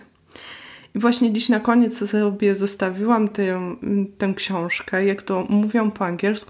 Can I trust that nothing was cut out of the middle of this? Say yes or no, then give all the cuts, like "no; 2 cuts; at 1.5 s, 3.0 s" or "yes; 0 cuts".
yes; 0 cuts